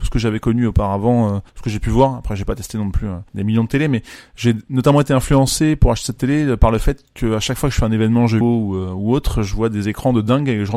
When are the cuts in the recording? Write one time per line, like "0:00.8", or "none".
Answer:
0:01.5
0:03.3
0:08.4